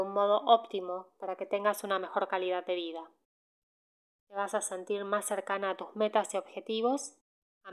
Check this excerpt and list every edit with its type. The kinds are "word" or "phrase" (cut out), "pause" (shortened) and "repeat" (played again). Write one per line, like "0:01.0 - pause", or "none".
none